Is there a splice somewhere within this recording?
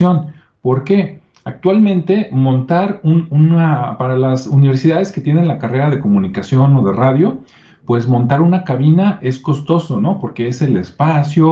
no; 0 cuts

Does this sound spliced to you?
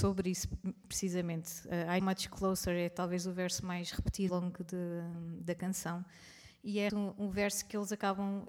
yes; 3 cuts; at 2.0 s, 4.3 s, 6.9 s

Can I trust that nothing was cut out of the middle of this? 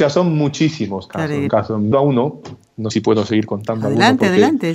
no; 3 cuts; at 1.5 s, 1.9 s, 2.9 s

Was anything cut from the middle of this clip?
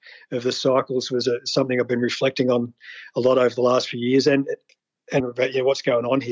yes; 1 cut; at 5.2 s

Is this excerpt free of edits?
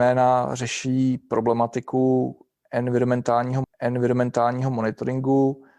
no; 1 cut; at 3.6 s

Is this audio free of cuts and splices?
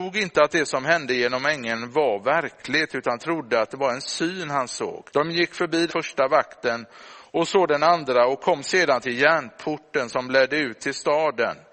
no; 2 cuts; at 5.1 s, 5.9 s

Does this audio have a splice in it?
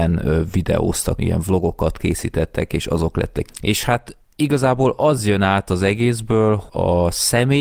yes; 3 cuts; at 1.2 s, 3.5 s, 6.7 s

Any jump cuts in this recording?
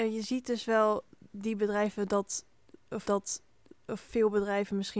yes; 1 cut; at 3.1 s

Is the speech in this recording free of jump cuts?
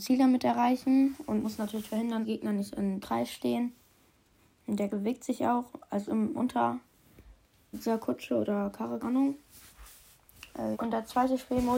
no; 9 cuts; at 1.4 s, 2.2 s, 3.0 s, 4.9 s, 6.0 s, 6.4 s, 7.7 s, 9.0 s, 10.7 s

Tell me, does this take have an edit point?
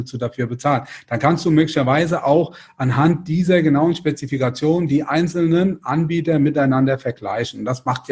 no; 0 cuts

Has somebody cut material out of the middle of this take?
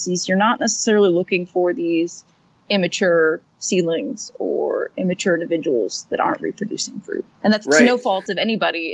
yes; 1 cut; at 7.3 s

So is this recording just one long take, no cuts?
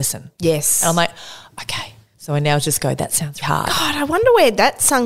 no; 1 cut; at 3.4 s

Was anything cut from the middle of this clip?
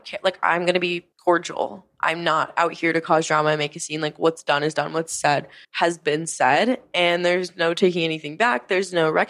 yes; 2 cuts; at 1.1 s, 5.6 s

